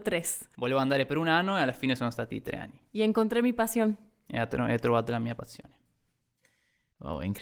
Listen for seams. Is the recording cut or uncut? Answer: uncut